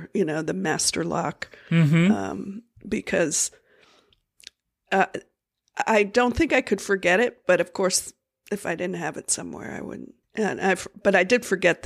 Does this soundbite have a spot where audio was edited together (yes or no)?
yes